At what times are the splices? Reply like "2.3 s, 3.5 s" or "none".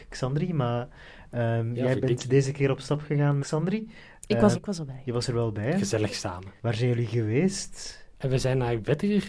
3.4 s, 4.5 s, 6.6 s